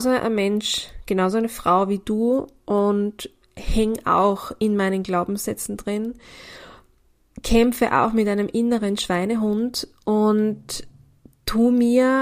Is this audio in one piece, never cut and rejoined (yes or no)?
yes